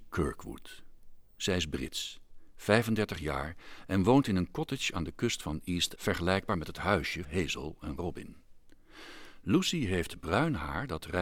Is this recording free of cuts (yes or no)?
no